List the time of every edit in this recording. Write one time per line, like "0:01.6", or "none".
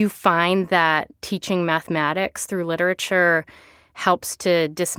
0:01.2